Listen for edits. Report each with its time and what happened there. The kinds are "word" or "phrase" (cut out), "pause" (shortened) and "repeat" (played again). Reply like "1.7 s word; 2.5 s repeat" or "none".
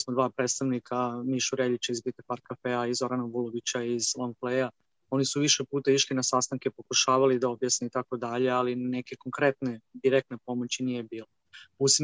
none